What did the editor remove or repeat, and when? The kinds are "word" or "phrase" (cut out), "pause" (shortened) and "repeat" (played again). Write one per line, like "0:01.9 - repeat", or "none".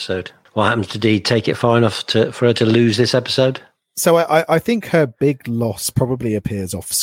none